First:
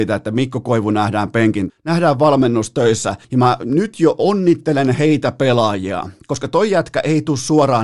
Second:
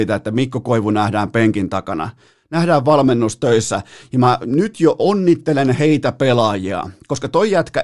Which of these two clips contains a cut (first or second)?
first